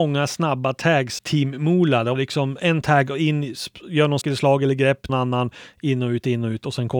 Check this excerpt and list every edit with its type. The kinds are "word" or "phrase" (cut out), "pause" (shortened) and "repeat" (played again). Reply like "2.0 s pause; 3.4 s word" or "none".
1.2 s word; 2.2 s word; 4.2 s word; 5.1 s phrase